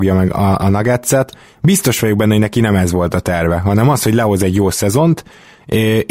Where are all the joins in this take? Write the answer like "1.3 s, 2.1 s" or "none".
none